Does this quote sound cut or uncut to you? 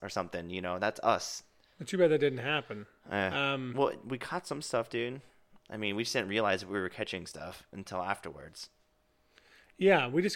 uncut